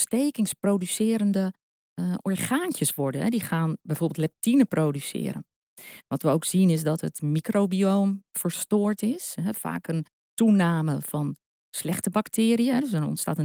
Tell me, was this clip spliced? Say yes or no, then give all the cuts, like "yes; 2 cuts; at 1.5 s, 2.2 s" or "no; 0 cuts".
no; 0 cuts